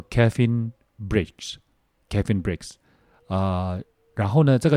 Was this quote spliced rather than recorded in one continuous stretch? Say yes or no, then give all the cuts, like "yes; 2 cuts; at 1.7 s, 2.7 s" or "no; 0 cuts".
no; 0 cuts